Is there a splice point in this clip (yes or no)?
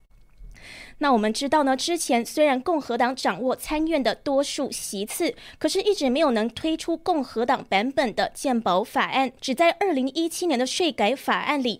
yes